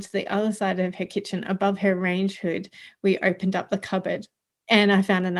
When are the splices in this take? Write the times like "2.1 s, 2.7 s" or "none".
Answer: none